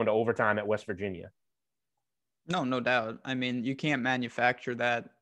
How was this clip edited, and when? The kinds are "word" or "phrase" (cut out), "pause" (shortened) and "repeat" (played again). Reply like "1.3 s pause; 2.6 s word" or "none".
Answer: none